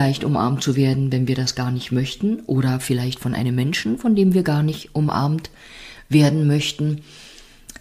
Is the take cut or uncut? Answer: uncut